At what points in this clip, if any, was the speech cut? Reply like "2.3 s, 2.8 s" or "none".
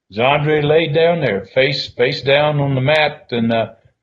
none

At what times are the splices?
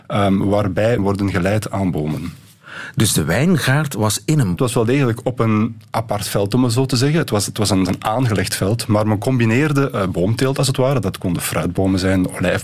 1.0 s, 4.6 s, 7.9 s

